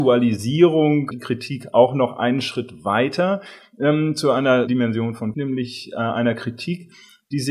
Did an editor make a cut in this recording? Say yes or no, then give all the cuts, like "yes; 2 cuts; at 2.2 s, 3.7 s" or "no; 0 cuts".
yes; 3 cuts; at 1.1 s, 4.7 s, 5.3 s